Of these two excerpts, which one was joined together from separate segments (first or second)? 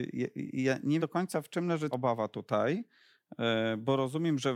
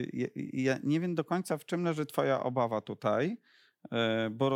first